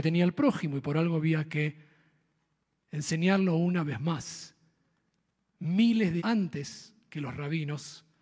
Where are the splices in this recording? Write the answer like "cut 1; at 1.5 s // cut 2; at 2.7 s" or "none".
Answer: cut 1; at 6.2 s